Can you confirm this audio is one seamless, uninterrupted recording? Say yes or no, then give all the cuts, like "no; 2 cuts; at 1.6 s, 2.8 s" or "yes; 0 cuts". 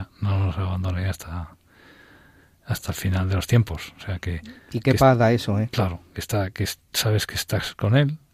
yes; 0 cuts